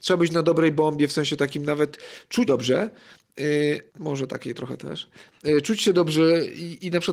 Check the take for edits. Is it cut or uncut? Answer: cut